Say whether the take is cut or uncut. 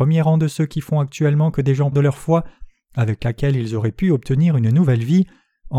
cut